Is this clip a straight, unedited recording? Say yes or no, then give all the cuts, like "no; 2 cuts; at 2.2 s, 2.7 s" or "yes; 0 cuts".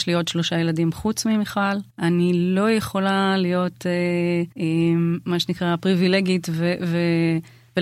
no; 2 cuts; at 1.9 s, 4.5 s